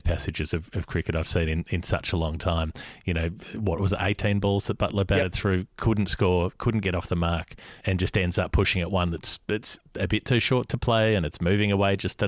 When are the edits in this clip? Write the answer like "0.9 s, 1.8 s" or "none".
7.8 s